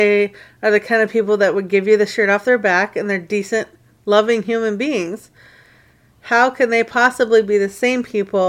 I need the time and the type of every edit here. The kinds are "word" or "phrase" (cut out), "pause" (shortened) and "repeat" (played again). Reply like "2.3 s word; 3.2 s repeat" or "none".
none